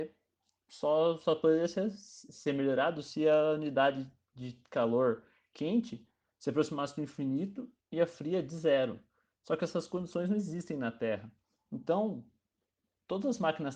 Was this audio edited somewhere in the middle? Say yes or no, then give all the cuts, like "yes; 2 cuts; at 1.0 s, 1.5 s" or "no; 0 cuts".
no; 0 cuts